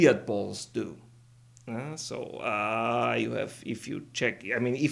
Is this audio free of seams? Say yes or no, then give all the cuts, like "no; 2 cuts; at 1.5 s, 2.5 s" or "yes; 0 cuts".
yes; 0 cuts